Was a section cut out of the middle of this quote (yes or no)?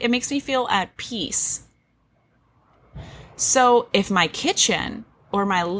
no